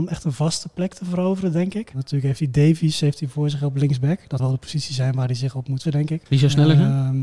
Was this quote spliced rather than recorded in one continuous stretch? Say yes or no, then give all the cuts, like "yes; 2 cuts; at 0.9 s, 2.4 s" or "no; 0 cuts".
yes; 3 cuts; at 4.4 s, 5.8 s, 6.3 s